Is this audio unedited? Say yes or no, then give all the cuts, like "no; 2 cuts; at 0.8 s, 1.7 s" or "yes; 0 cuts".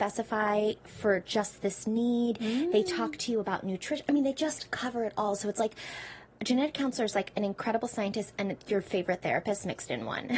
yes; 0 cuts